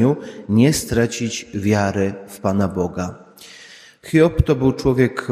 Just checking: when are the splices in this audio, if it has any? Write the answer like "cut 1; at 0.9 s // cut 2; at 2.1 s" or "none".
none